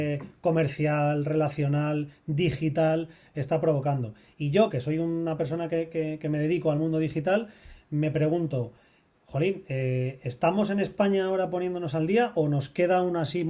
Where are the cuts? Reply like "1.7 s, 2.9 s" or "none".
none